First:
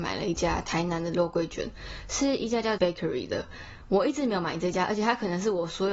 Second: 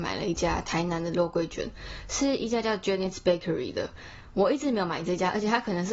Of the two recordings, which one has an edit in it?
first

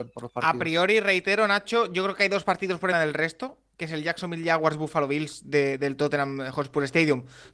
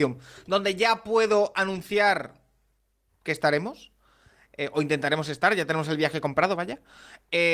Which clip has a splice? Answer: first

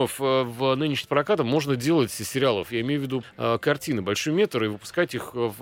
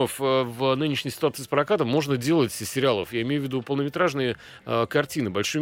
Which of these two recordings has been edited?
first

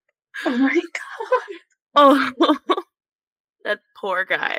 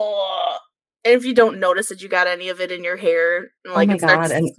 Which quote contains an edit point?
second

